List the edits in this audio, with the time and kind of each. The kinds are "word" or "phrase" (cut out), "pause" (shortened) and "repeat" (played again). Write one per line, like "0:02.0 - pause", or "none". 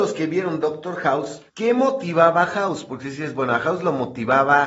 0:01.5 - pause